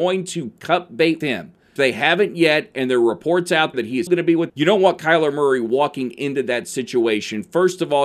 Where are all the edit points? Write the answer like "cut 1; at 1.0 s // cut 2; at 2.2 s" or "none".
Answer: cut 1; at 1.2 s // cut 2; at 1.8 s // cut 3; at 3.7 s // cut 4; at 4.1 s // cut 5; at 4.5 s